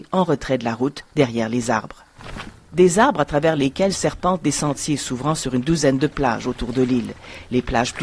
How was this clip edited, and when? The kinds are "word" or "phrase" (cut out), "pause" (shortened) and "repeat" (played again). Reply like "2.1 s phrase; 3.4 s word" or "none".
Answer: none